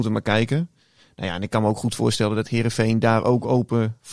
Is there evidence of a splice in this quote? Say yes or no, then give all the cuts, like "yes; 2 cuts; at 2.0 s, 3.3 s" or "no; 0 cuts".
no; 0 cuts